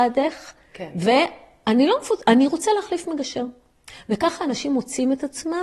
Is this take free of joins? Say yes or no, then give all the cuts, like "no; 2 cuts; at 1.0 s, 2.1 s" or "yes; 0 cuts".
yes; 0 cuts